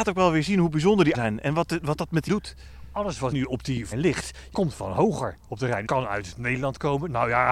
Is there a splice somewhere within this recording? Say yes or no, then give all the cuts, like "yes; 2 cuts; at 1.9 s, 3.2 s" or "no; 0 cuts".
yes; 6 cuts; at 1.1 s, 2.3 s, 3.3 s, 3.9 s, 4.5 s, 5.9 s